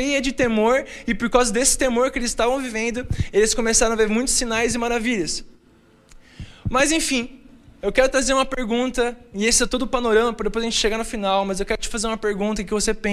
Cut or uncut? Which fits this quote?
uncut